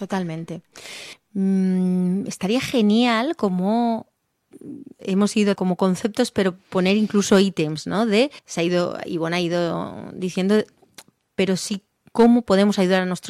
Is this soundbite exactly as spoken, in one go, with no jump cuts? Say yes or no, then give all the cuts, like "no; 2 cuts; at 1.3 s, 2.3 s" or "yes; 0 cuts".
no; 4 cuts; at 1.1 s, 5.0 s, 5.6 s, 8.4 s